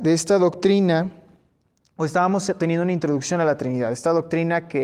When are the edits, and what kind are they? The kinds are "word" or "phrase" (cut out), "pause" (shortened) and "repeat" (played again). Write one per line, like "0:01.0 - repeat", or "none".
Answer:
none